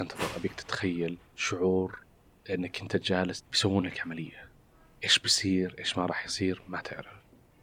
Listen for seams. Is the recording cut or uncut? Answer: cut